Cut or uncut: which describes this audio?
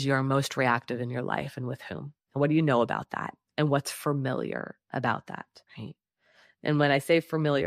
cut